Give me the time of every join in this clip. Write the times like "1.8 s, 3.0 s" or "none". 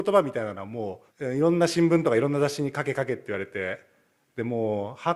1.1 s